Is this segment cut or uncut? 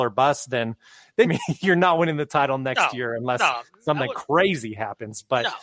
cut